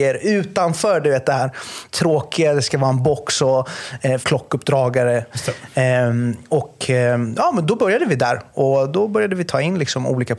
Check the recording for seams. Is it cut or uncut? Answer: cut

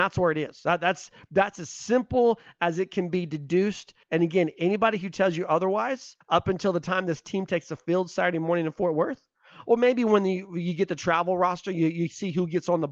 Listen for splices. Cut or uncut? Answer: cut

